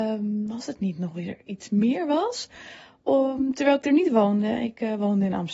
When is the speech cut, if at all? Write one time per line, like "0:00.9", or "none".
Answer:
none

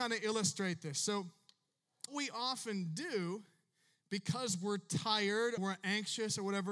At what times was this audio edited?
0:02.1
0:05.6

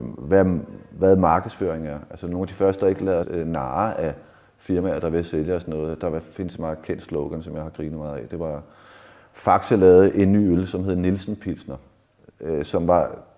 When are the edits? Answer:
0:03.2

